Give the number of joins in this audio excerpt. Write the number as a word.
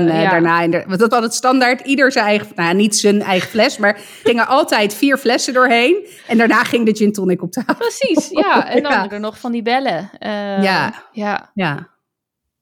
three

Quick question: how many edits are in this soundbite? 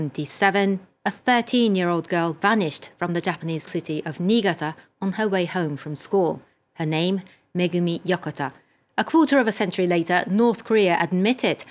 one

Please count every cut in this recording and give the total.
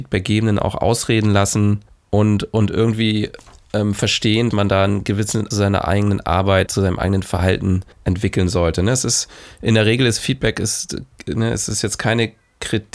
five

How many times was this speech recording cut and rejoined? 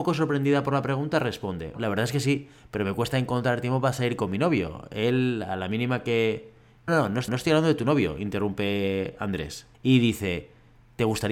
four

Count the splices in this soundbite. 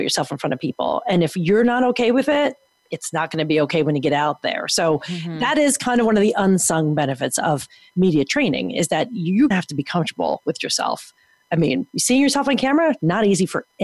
one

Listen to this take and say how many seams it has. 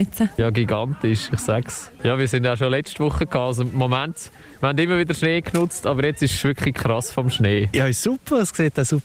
zero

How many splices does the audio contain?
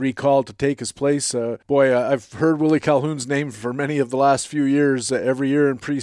one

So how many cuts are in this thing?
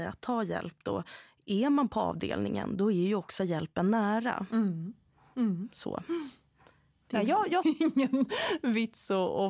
one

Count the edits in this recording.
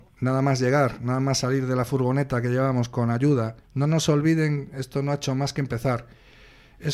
one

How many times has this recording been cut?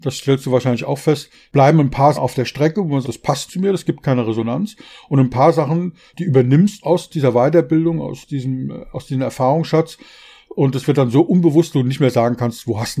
five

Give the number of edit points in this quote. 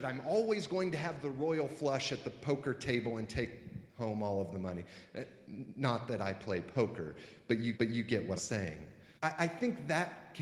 four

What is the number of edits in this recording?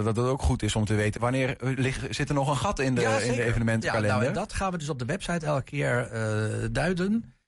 one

